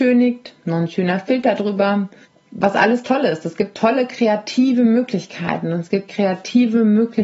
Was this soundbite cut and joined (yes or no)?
yes